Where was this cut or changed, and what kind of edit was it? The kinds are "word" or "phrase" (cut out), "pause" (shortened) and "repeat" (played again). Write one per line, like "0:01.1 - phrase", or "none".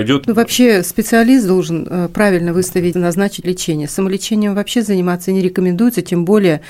0:02.9 - word
0:03.4 - word